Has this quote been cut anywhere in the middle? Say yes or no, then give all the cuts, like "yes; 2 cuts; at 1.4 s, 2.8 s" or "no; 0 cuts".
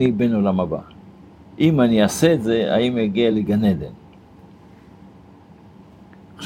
no; 0 cuts